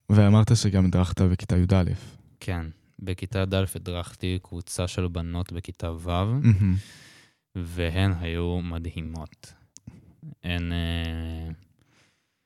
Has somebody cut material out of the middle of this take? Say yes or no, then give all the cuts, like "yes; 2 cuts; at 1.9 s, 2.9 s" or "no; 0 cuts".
no; 0 cuts